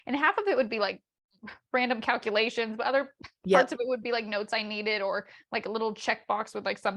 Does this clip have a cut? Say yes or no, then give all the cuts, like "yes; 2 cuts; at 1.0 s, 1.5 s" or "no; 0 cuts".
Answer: no; 0 cuts